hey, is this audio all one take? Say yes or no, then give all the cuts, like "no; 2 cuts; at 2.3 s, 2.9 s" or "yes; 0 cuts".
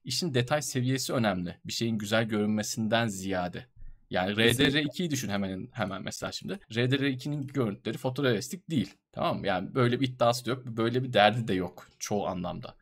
no; 2 cuts; at 6.6 s, 9.0 s